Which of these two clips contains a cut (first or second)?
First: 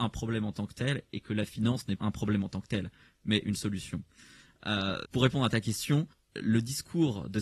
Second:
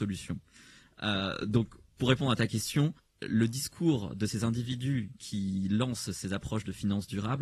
first